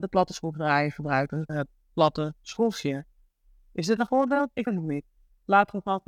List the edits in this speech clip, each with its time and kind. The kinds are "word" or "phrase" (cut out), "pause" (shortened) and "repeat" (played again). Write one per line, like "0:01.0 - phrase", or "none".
0:01.5 - word
0:04.1 - word
0:04.7 - word

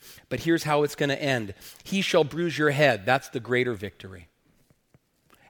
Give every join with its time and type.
none

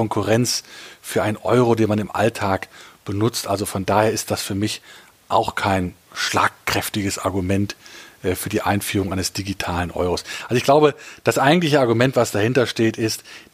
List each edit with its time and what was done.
none

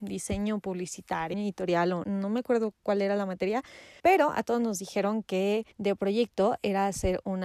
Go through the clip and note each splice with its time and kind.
0:01.3 - word
0:02.0 - word
0:04.0 - pause
0:05.7 - pause

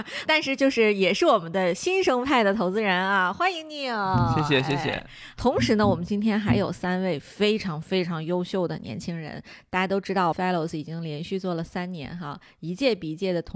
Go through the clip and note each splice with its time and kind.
0:10.3 - phrase

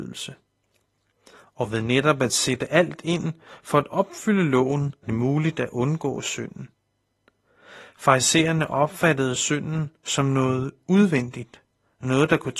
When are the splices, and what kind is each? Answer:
0:05.0 - word

